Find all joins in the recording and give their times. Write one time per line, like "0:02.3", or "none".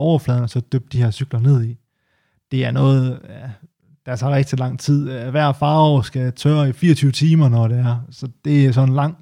none